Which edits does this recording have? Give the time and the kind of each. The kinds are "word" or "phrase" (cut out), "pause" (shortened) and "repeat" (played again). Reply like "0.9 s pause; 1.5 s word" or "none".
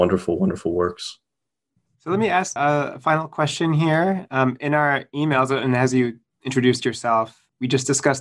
none